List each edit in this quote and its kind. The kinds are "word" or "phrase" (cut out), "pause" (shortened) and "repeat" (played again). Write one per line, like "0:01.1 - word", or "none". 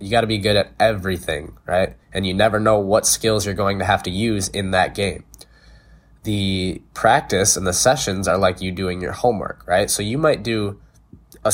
0:02.0 - pause
0:06.9 - pause